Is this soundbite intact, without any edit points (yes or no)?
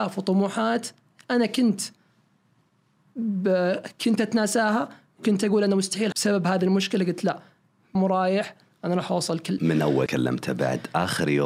no